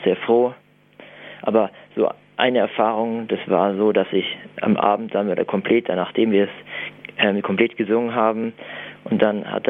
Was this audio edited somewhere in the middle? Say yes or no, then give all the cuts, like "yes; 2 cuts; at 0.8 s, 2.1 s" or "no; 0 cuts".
no; 0 cuts